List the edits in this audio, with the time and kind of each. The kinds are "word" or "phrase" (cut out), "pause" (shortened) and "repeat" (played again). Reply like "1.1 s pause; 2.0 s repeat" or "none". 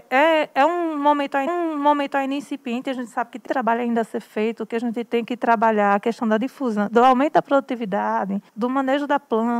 1.5 s repeat; 3.5 s word; 6.9 s word; 8.5 s pause

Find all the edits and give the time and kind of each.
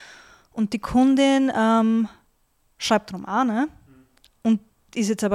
none

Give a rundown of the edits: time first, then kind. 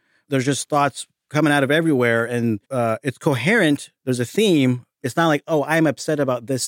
2.6 s pause; 4.0 s pause

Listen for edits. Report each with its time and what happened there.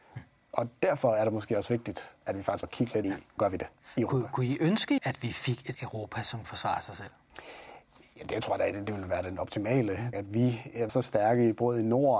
2.6 s word; 3.0 s word; 3.4 s word; 5.0 s word; 5.7 s word; 6.4 s word; 10.1 s word; 10.9 s word

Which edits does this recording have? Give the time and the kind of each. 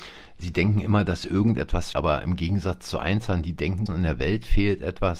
1.9 s word; 3.9 s word

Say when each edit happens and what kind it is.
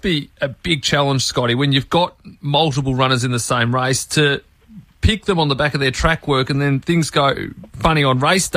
none

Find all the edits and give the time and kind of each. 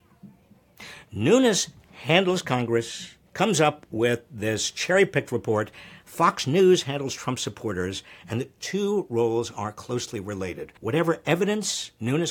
3.3 s pause; 10.8 s pause

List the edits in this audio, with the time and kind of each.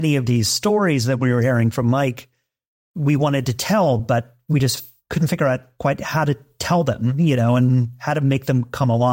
none

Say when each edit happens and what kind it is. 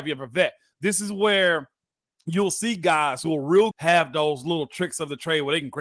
3.7 s word

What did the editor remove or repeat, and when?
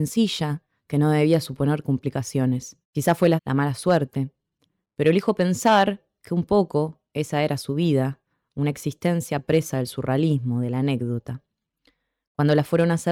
2.8 s pause; 3.4 s word

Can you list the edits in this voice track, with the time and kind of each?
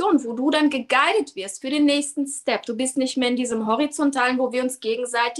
none

